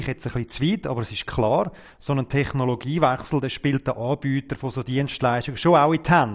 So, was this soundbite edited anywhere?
no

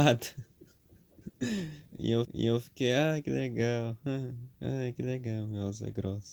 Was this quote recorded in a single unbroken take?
no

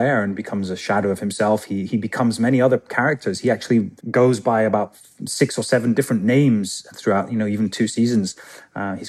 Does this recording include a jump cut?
yes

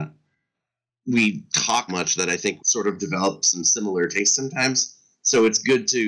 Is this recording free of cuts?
no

